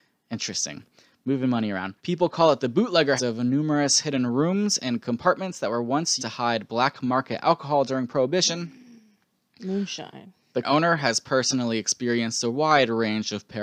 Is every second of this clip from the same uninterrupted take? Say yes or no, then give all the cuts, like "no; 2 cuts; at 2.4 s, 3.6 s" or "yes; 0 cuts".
no; 4 cuts; at 2.0 s, 3.2 s, 6.2 s, 10.6 s